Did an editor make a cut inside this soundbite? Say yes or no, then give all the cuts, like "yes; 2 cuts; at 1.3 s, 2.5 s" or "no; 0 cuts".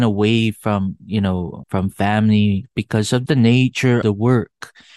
yes; 5 cuts; at 1.0 s, 1.6 s, 2.7 s, 3.3 s, 4.0 s